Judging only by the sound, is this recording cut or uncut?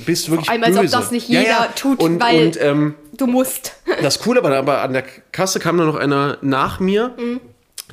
uncut